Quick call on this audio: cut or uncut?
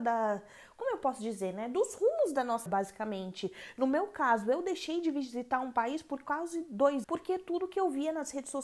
cut